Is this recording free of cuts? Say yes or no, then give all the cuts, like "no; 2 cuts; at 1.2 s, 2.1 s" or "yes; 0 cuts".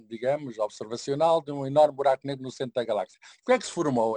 yes; 0 cuts